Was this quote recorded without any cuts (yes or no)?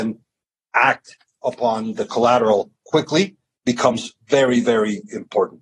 yes